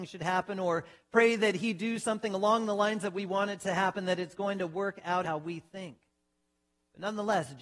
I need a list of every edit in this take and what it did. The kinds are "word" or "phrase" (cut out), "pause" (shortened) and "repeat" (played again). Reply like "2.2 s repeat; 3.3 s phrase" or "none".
5.2 s word